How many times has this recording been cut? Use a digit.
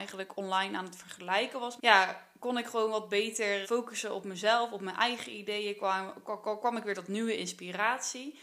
2